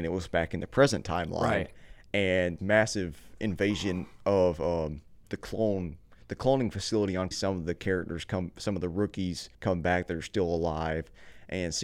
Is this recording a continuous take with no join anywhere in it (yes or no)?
no